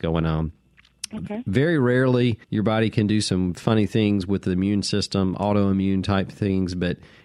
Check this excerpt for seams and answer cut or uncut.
cut